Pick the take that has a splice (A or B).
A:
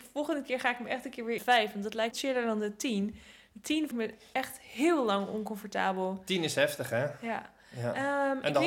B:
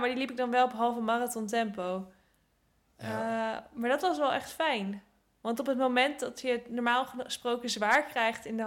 A